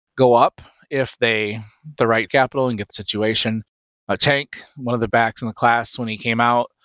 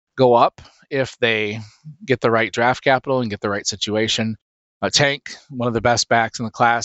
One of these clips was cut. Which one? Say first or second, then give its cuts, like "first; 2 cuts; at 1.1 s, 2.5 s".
first; 4 cuts; at 2.0 s, 2.3 s, 2.9 s, 5.1 s